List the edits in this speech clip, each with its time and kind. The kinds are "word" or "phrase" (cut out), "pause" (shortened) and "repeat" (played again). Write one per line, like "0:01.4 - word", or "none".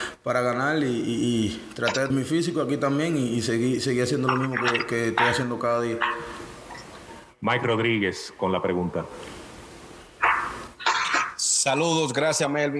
0:02.1 - phrase